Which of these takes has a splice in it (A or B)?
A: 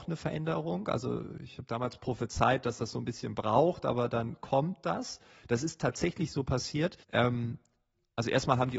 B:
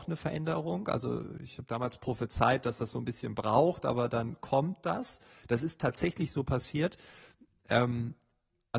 A